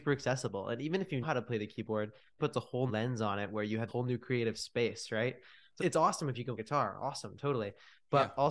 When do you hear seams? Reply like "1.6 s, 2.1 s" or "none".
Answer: 1.2 s, 2.4 s, 2.9 s, 3.9 s, 5.8 s, 6.6 s